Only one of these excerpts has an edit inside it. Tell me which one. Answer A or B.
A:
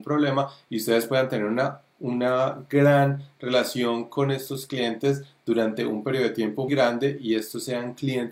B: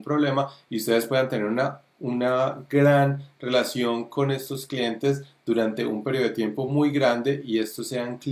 A